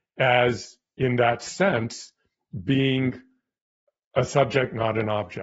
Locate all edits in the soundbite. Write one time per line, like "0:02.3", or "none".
none